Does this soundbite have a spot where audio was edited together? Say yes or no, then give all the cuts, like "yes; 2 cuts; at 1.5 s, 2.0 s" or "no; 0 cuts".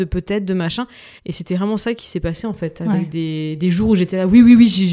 yes; 2 cuts; at 1.2 s, 2.0 s